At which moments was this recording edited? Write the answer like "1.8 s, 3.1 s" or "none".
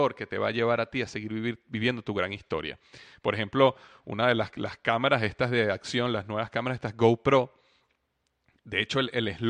none